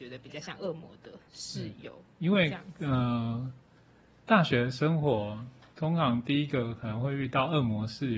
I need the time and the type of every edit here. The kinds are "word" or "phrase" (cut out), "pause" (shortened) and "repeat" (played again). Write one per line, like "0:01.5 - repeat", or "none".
0:01.3 - pause